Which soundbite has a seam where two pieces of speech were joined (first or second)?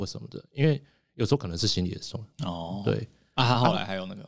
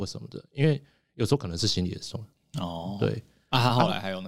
first